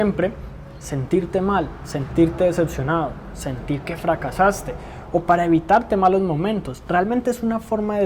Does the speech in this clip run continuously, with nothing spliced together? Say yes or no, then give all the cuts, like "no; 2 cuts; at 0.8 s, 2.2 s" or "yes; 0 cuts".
yes; 0 cuts